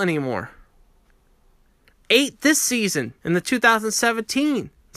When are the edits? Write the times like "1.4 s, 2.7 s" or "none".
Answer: 3.2 s

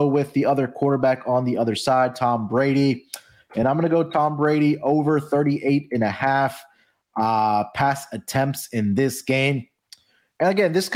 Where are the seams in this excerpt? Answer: none

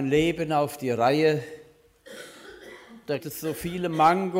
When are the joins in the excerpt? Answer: 3.2 s

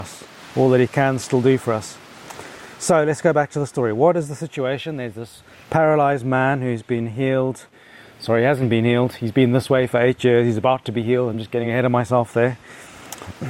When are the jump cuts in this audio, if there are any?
none

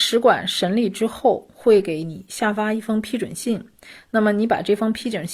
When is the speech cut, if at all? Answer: none

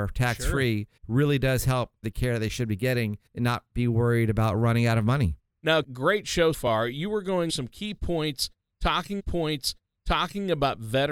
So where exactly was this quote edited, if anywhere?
1.0 s, 2.0 s, 3.3 s, 5.8 s, 6.5 s, 7.5 s, 9.2 s

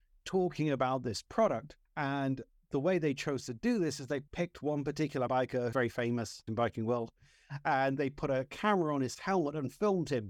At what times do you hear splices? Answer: 1.9 s, 4.3 s, 5.3 s, 5.7 s, 6.5 s

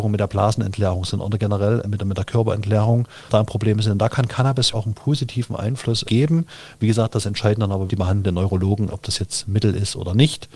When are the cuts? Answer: 1.8 s, 3.3 s, 4.7 s, 6.0 s, 7.9 s, 8.9 s

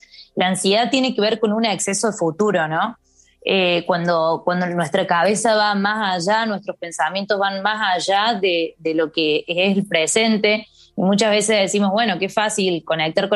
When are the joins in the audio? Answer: none

